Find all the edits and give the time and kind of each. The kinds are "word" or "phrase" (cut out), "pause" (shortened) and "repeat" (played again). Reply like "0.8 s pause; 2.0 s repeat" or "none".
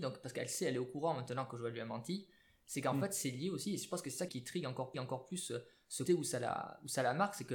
4.3 s word; 4.9 s repeat; 6.1 s word